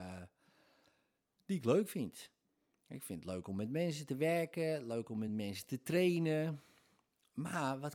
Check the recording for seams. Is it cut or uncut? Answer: uncut